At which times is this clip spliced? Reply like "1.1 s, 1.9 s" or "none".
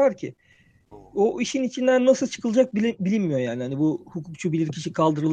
none